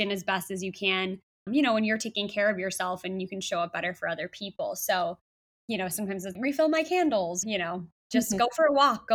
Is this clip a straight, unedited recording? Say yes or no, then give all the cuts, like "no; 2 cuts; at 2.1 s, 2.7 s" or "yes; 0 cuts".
no; 4 cuts; at 1.5 s, 5.5 s, 6.3 s, 7.4 s